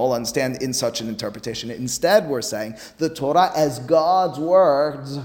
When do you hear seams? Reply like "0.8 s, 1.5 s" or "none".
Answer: none